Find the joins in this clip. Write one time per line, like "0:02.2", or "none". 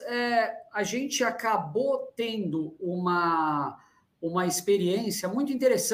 none